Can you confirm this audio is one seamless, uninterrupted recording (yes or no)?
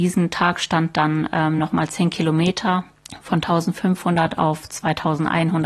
yes